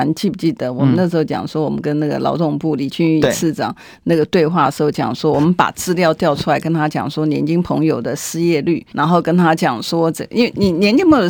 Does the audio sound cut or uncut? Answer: cut